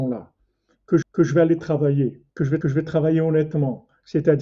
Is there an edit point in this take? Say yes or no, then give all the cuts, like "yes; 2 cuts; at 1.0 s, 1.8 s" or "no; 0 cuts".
yes; 3 cuts; at 1.0 s, 2.3 s, 2.6 s